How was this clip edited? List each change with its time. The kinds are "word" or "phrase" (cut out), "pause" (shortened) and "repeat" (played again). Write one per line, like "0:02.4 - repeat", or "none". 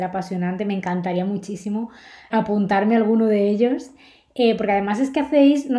0:02.3 - word